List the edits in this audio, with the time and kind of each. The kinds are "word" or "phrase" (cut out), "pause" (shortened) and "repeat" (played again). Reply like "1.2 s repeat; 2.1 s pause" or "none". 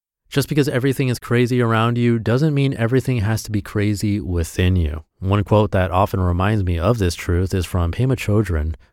5.1 s pause